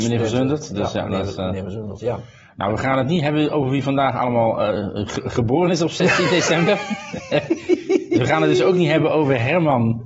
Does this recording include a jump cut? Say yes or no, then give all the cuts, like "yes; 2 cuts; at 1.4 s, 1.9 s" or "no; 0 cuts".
no; 0 cuts